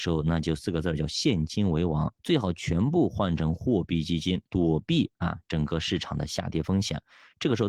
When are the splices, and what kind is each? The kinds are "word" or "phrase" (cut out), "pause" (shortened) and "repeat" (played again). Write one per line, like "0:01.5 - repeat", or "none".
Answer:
0:02.2 - pause
0:04.5 - pause